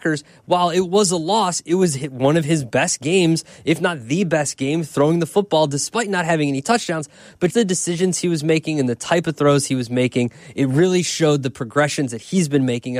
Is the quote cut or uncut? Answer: cut